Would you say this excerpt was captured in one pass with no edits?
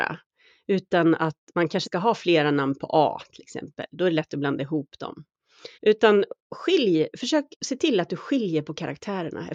no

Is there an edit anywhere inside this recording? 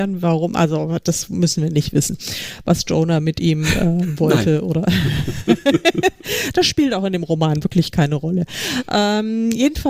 no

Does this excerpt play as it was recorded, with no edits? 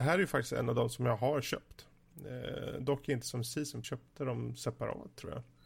no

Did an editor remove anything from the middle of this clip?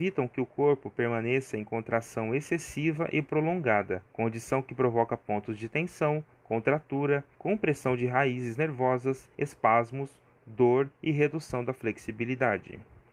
yes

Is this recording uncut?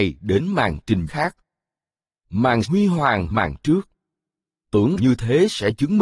no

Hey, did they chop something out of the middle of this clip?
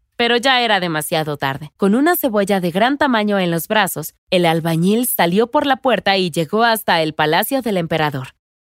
yes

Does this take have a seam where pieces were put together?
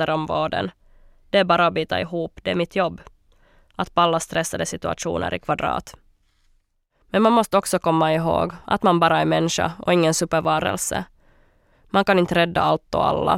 no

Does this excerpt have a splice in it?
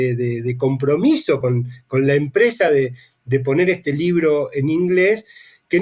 no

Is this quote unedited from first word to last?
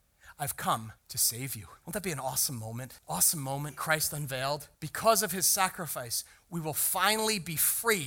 no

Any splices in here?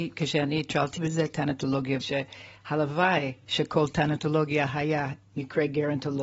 yes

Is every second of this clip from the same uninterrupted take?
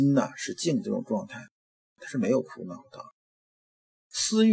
yes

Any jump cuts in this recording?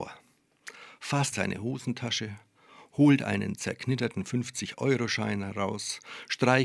yes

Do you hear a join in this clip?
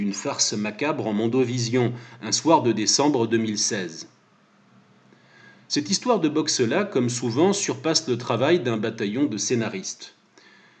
no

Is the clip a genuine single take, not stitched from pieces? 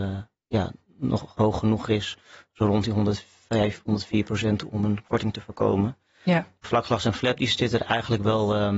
yes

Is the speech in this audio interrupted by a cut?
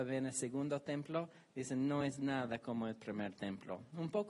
no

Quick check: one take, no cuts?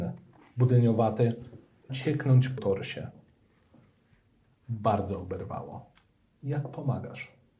no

